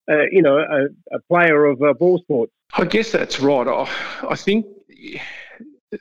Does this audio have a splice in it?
no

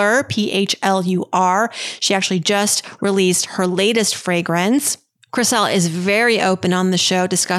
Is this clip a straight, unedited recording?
yes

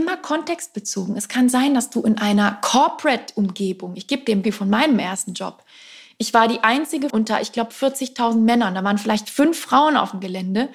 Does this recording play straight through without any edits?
no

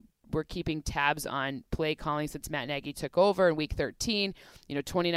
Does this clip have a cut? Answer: no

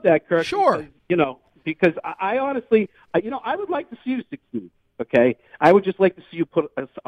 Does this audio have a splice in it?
no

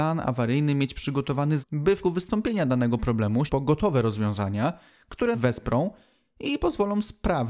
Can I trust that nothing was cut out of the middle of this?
no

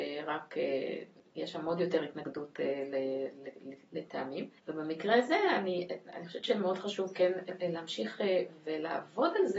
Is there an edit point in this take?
yes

